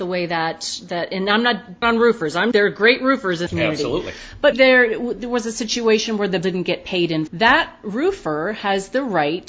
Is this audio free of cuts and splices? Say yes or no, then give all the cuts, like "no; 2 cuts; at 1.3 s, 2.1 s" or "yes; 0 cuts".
no; 6 cuts; at 1.8 s, 2.5 s, 3.5 s, 4.5 s, 6.4 s, 7.3 s